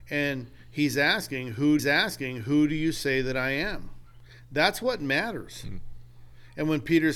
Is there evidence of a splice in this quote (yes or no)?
yes